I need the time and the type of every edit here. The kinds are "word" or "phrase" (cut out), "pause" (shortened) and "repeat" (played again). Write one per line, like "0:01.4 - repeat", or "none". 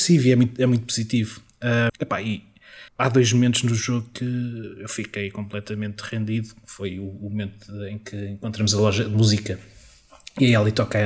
0:01.9 - word
0:02.9 - pause